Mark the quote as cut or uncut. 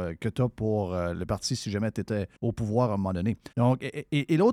cut